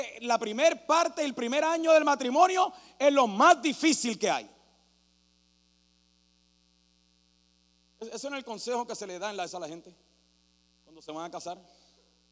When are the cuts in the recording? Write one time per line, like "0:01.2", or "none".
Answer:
0:09.5